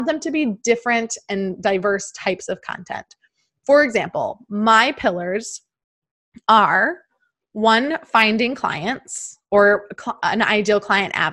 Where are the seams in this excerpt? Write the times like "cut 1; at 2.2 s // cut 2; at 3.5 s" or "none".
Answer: none